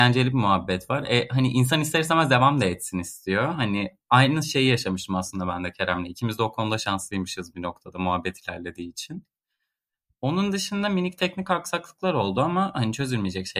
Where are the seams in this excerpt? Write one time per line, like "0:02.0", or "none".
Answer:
none